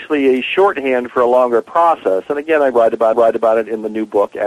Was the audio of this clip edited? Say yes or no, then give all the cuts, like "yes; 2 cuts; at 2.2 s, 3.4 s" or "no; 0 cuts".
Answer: yes; 1 cut; at 3.1 s